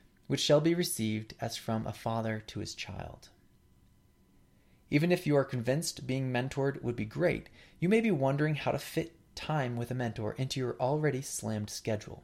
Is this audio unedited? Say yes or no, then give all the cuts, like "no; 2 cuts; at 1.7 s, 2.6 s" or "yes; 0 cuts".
yes; 0 cuts